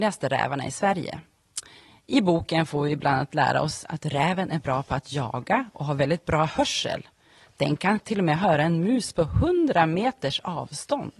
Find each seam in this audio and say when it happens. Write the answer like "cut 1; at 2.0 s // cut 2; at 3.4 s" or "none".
none